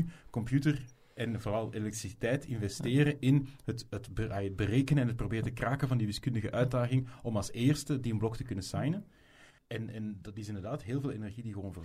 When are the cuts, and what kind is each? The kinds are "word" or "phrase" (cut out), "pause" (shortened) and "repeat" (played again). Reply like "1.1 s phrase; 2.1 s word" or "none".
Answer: none